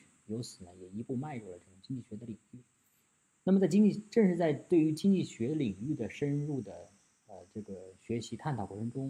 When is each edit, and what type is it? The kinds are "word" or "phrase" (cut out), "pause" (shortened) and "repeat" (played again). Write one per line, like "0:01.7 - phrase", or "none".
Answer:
none

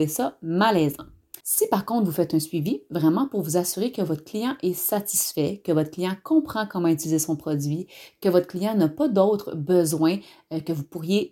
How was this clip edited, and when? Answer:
0:01.4 - pause

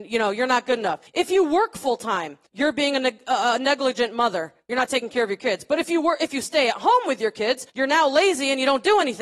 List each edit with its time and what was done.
0:01.1 - pause
0:02.5 - pause
0:07.7 - pause

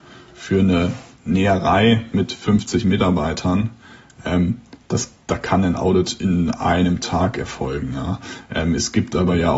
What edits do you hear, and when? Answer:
none

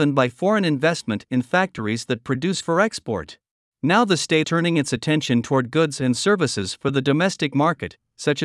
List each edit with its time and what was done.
0:02.6 - word
0:03.6 - pause
0:04.4 - word

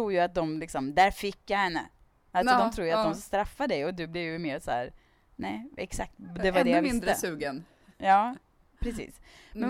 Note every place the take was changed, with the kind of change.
none

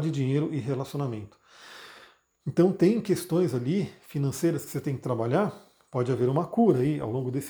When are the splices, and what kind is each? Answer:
none

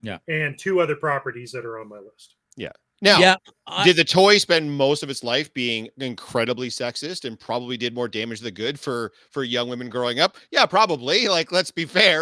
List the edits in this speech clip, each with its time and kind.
none

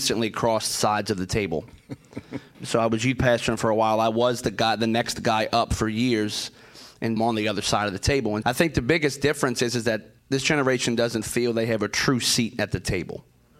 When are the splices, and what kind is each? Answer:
0:02.5 - word
0:07.2 - phrase
0:08.4 - word
0:10.2 - pause

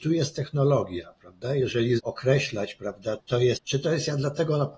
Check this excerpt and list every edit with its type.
0:02.0 - word
0:03.2 - word
0:03.6 - word

